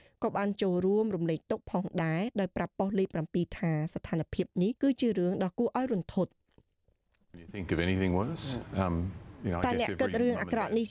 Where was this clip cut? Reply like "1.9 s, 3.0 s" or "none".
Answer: 4.8 s